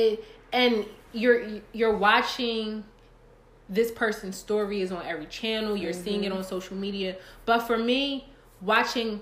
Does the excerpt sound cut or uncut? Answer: uncut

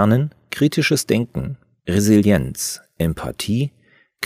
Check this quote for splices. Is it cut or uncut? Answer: uncut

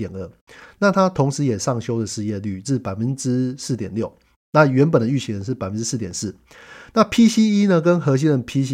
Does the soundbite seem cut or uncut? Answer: uncut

